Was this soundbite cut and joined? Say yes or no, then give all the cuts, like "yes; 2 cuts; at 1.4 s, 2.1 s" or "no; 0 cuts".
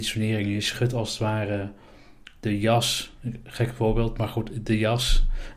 no; 0 cuts